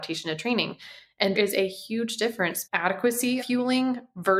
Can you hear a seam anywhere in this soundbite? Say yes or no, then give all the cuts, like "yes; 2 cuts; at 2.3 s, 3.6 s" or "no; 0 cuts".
yes; 3 cuts; at 1.3 s, 2.6 s, 3.4 s